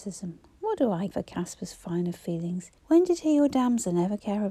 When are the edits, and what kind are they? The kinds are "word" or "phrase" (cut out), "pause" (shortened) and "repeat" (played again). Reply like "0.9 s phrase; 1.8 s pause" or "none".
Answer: 1.1 s word; 2.8 s pause